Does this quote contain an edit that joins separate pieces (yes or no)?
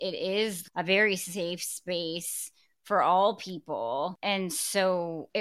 no